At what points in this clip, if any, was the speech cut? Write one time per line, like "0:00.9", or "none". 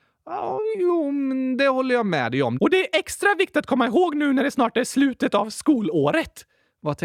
none